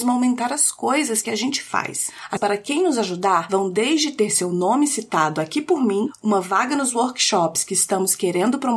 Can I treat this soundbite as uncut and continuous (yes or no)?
no